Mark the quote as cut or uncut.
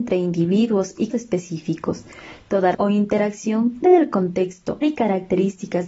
cut